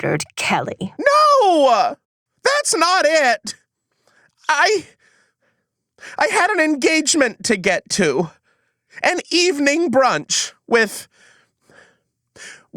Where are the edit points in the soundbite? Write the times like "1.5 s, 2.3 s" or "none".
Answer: none